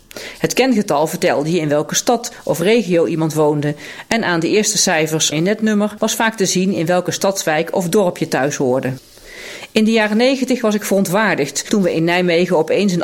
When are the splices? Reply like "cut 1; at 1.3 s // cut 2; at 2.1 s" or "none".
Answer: cut 1; at 5.3 s